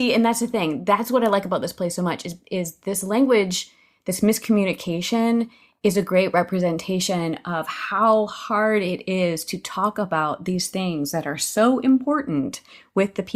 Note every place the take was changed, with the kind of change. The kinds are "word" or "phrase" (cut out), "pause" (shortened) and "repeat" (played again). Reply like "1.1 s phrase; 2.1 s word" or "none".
none